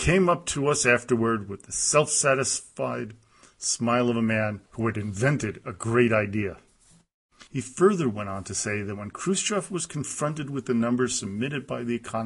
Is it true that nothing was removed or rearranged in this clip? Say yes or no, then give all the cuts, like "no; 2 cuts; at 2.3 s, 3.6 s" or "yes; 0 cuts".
no; 2 cuts; at 4.7 s, 7.5 s